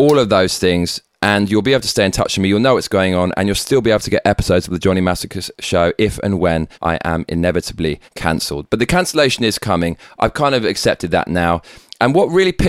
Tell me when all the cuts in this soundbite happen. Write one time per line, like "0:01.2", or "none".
0:06.7
0:08.1